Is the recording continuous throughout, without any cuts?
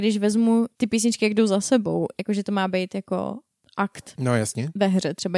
yes; 0 cuts

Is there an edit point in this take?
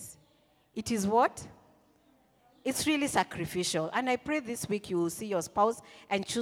no; 0 cuts

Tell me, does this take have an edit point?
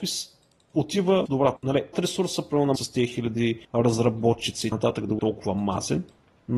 yes; 7 cuts; at 1.3 s, 1.6 s, 1.9 s, 2.8 s, 3.6 s, 4.7 s, 5.2 s

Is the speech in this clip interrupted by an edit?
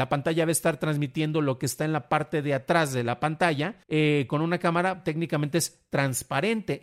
yes; 1 cut; at 3.8 s

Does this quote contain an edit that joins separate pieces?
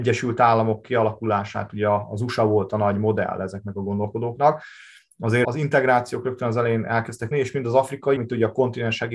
yes; 3 cuts; at 5.4 s, 7.3 s, 8.2 s

